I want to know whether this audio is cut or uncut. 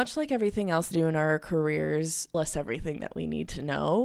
cut